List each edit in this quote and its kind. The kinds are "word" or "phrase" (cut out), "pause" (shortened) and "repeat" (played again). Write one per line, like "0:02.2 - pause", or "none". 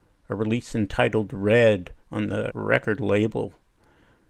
0:02.0 - pause
0:02.5 - word